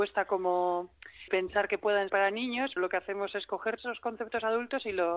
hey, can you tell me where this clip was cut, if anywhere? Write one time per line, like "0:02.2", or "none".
0:01.3
0:02.1
0:02.8
0:03.8